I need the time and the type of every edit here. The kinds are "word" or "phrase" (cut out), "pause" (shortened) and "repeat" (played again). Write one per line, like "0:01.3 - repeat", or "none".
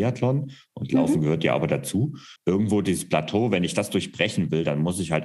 0:02.4 - pause